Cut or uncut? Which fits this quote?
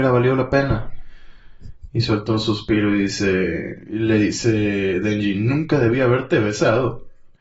uncut